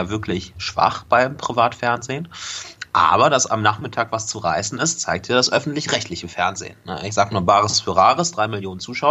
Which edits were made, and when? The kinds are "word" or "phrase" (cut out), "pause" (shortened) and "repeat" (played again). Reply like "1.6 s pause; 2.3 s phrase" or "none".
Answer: none